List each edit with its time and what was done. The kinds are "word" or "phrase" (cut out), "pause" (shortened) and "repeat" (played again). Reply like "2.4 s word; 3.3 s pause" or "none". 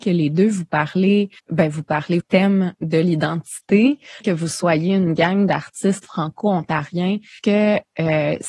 1.4 s pause; 2.2 s phrase; 4.2 s phrase; 7.4 s word